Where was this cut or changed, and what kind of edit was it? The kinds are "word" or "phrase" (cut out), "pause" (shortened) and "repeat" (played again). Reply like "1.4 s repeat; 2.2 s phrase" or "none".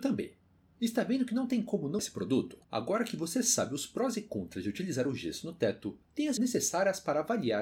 2.0 s word; 2.6 s pause; 6.0 s pause; 6.4 s word